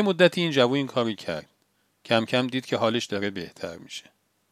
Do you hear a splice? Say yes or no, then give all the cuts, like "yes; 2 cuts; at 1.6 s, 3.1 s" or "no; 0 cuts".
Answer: no; 0 cuts